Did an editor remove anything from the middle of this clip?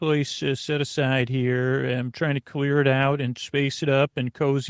no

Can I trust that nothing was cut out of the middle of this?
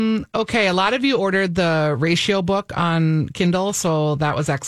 yes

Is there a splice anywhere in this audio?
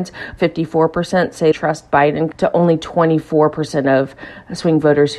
yes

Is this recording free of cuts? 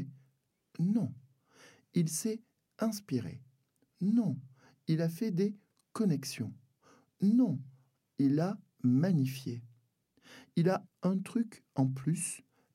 no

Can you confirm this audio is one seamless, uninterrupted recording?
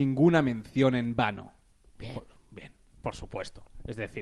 yes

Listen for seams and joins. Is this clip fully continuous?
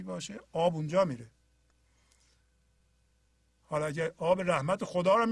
yes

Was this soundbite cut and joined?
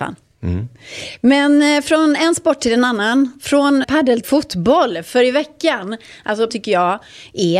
yes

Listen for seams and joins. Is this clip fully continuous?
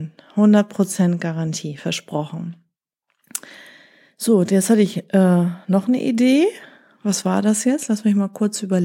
yes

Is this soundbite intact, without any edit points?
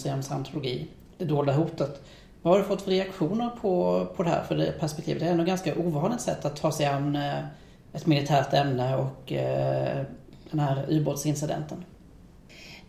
yes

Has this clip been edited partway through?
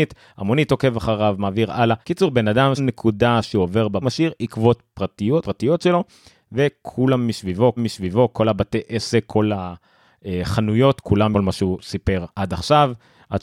yes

